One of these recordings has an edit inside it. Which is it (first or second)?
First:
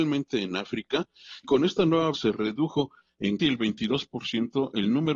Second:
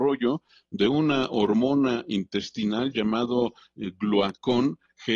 first